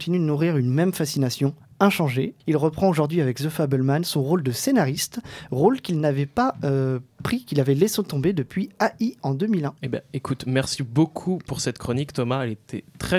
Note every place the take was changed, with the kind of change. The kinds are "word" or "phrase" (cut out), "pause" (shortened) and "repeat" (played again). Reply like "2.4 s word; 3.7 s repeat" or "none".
2.4 s pause; 9.8 s pause